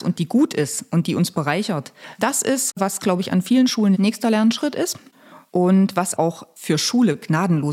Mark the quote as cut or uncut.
cut